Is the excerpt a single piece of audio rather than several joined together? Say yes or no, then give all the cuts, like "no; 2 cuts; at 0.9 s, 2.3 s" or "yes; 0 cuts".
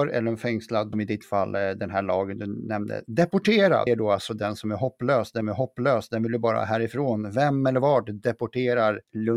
no; 3 cuts; at 0.9 s, 3.9 s, 5.4 s